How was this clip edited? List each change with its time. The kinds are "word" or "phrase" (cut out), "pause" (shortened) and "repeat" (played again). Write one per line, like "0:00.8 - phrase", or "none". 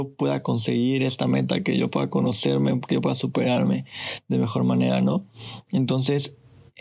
none